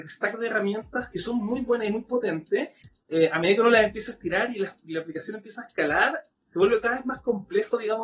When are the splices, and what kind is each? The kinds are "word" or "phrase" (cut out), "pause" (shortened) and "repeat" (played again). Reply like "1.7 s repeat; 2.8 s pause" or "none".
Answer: none